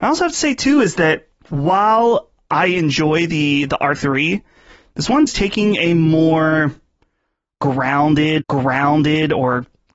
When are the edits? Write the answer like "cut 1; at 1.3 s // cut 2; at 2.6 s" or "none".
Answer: cut 1; at 1.4 s // cut 2; at 3.9 s // cut 3; at 5.3 s // cut 4; at 8.4 s

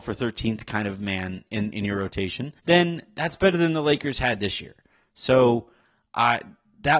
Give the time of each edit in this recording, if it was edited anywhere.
cut 1; at 1.7 s // cut 2; at 2.6 s

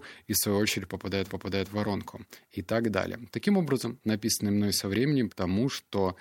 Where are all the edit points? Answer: cut 1; at 1.3 s // cut 2; at 4.0 s // cut 3; at 5.3 s

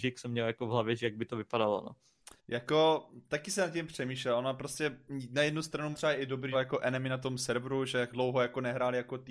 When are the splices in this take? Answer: cut 1; at 2.4 s // cut 2; at 5.9 s // cut 3; at 6.5 s // cut 4; at 8.1 s

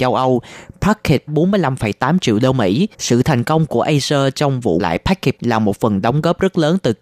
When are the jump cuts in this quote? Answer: cut 1; at 1.3 s // cut 2; at 2.9 s // cut 3; at 4.8 s // cut 4; at 5.4 s

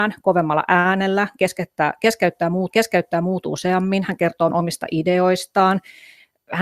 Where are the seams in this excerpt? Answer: cut 1; at 2.7 s // cut 2; at 4.5 s

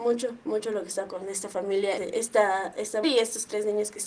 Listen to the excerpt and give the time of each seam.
cut 1; at 1.1 s // cut 2; at 2.0 s // cut 3; at 3.0 s

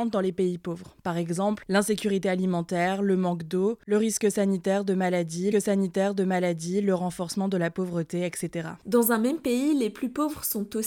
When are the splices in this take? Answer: cut 1; at 5.5 s

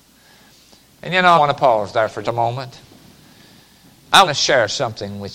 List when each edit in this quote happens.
cut 1; at 1.4 s // cut 2; at 2.2 s // cut 3; at 4.3 s

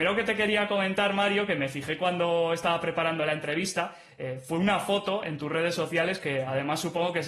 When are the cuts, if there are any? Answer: none

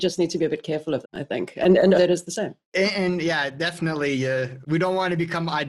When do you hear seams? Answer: cut 1; at 1.0 s // cut 2; at 2.0 s // cut 3; at 2.6 s // cut 4; at 4.6 s

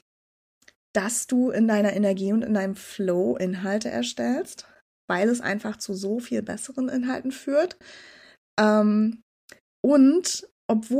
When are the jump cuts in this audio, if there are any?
none

